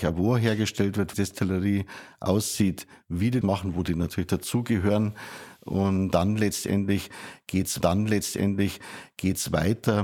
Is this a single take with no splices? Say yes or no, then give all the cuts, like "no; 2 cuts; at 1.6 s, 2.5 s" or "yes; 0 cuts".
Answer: no; 3 cuts; at 1.1 s, 3.4 s, 7.8 s